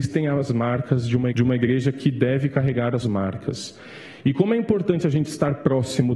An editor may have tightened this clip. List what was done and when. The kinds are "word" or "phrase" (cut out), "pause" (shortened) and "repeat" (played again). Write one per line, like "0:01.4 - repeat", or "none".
0:01.3 - phrase
0:03.0 - word